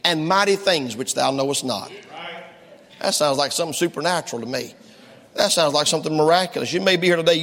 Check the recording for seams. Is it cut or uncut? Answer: uncut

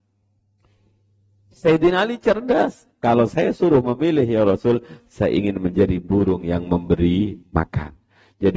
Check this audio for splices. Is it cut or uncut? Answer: cut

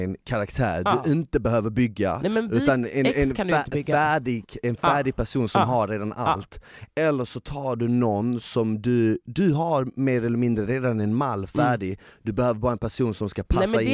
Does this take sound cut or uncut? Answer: uncut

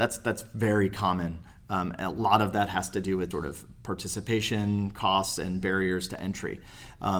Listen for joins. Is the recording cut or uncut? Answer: cut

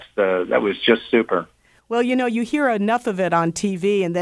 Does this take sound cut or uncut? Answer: uncut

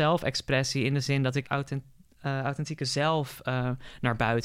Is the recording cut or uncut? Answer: cut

